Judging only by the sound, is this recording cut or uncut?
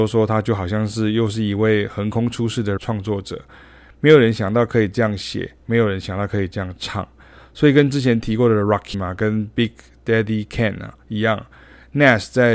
cut